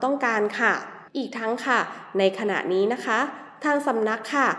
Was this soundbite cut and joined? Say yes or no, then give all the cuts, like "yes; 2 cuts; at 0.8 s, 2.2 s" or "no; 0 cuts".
yes; 1 cut; at 1.1 s